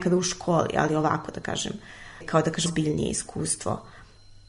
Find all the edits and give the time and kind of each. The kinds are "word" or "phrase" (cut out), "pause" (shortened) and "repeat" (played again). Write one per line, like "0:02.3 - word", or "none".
0:02.2 - word
0:02.7 - word

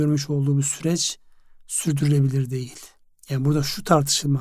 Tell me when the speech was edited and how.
none

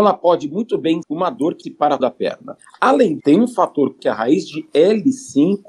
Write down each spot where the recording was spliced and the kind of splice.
0:01.0 - word
0:01.6 - word
0:02.0 - word
0:03.2 - word
0:04.0 - word

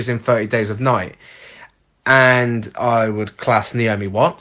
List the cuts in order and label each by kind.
none

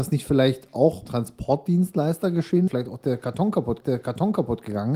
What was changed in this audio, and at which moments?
0:01.1 - word
0:02.7 - phrase
0:03.8 - repeat

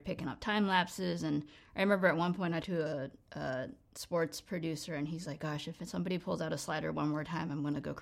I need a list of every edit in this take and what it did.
0:02.6 - word

